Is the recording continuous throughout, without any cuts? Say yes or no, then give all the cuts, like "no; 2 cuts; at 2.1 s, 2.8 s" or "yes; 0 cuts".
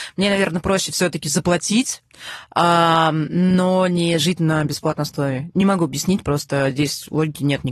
yes; 0 cuts